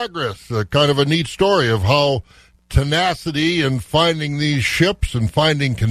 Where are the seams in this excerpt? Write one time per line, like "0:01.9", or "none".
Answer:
none